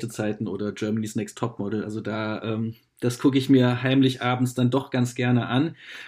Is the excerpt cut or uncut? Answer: uncut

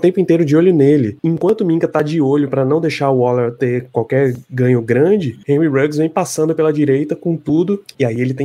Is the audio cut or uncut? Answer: uncut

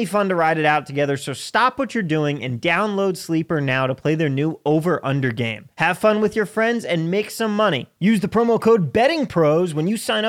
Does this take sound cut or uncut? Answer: cut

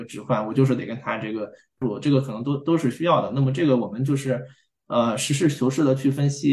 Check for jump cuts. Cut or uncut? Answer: uncut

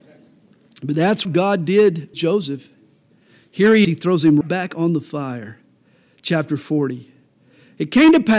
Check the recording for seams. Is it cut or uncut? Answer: cut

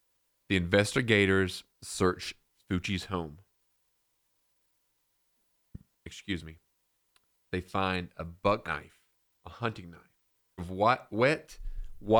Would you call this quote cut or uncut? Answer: cut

